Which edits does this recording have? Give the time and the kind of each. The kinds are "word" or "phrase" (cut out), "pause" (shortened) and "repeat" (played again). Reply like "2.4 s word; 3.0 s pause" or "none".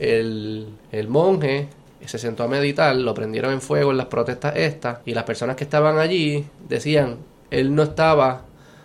5.0 s pause